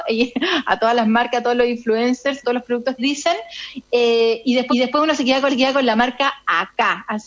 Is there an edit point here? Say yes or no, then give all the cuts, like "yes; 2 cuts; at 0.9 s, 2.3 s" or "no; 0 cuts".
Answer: yes; 4 cuts; at 2.4 s, 3.0 s, 4.7 s, 5.5 s